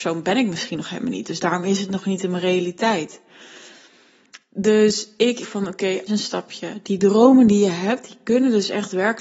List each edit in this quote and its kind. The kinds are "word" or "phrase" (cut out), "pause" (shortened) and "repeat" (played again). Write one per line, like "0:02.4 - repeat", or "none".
0:05.4 - phrase
0:06.1 - phrase